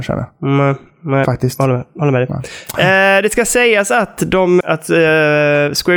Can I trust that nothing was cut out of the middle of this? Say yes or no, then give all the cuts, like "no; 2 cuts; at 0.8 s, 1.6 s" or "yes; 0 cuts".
no; 1 cut; at 4.6 s